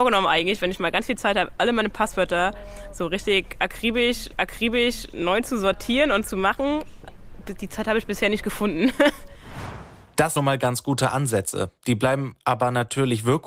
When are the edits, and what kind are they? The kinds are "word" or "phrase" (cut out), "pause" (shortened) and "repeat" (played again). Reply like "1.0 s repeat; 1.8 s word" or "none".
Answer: 4.3 s repeat; 10.4 s phrase